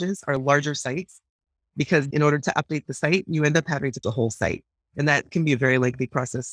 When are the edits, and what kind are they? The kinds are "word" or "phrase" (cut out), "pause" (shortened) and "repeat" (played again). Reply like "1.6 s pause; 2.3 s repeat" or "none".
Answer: 2.1 s word; 4.0 s word